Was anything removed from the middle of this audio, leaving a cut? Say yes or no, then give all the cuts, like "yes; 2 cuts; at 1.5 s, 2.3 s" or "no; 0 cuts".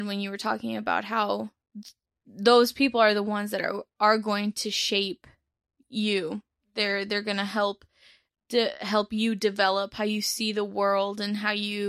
no; 0 cuts